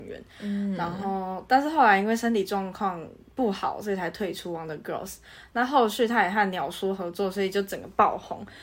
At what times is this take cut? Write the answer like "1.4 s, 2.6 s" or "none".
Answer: none

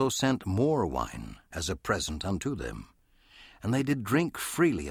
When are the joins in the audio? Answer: none

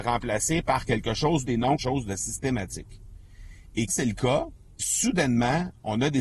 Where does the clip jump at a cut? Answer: 1.5 s, 1.8 s, 3.9 s, 4.8 s

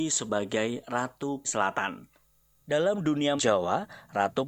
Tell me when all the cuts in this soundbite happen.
1.4 s, 3.4 s

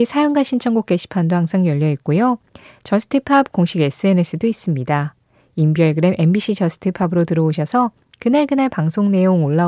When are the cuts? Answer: none

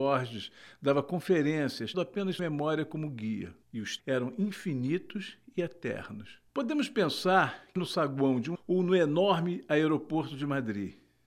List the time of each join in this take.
1.9 s, 2.4 s, 3.6 s, 4.0 s, 6.5 s, 7.8 s, 8.5 s

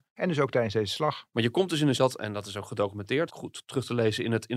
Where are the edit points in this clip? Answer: 1.9 s, 3.3 s

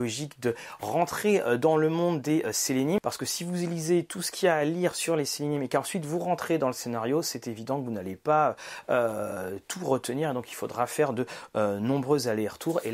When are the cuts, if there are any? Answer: none

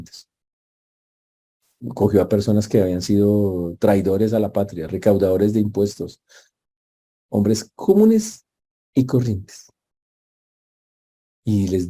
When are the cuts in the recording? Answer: none

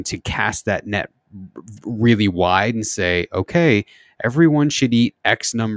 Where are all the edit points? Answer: none

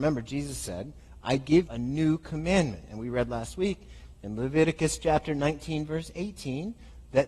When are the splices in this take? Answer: 1.7 s

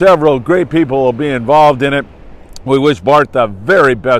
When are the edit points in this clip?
none

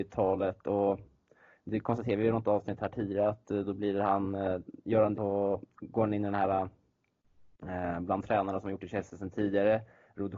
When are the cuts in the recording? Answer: 5.1 s

